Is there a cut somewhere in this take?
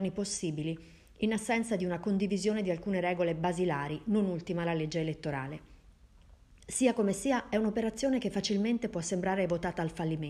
no; 0 cuts

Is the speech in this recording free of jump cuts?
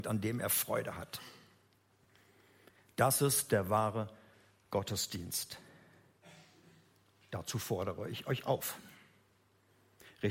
yes; 0 cuts

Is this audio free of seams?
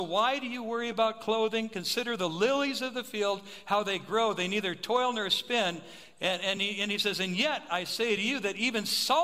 yes; 0 cuts

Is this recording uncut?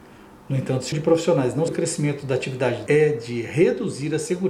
no; 3 cuts; at 0.9 s, 1.7 s, 2.9 s

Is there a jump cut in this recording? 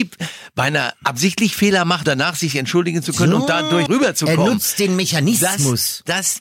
yes; 2 cuts; at 2.0 s, 3.9 s

